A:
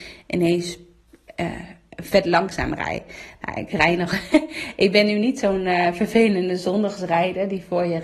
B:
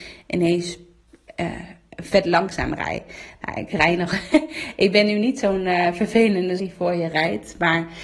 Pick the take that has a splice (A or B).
B